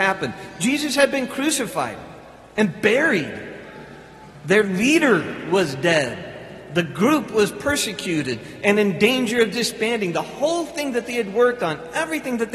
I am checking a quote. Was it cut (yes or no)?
no